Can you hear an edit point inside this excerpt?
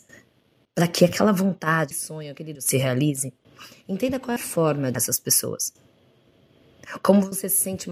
yes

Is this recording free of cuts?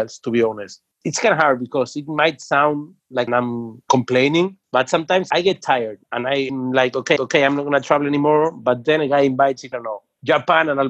no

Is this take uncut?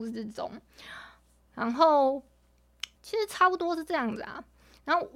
no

